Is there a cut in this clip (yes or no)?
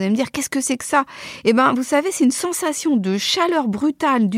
no